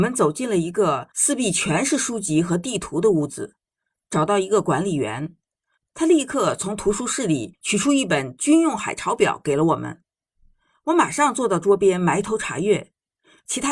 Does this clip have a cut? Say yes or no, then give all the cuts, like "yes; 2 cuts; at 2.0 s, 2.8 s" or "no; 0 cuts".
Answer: no; 0 cuts